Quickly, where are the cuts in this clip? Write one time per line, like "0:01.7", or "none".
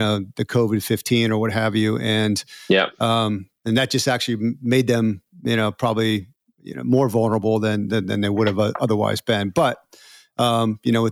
none